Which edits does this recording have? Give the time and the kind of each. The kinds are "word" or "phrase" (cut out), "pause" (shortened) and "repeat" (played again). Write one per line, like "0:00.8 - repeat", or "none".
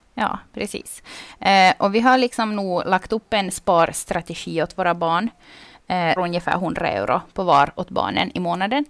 0:06.2 - phrase